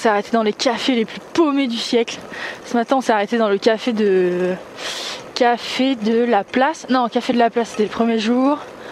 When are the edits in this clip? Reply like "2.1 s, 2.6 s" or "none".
none